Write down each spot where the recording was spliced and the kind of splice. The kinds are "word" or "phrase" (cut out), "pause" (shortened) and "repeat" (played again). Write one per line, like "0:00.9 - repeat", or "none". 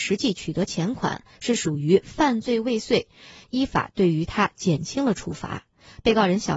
0:03.4 - phrase